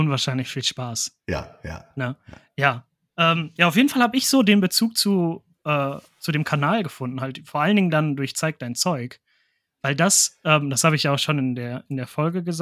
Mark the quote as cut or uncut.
uncut